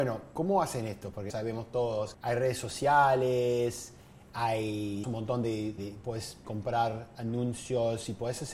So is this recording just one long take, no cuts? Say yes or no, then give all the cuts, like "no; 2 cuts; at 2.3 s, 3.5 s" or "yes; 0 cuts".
no; 5 cuts; at 1.3 s, 2.1 s, 5.0 s, 5.8 s, 6.4 s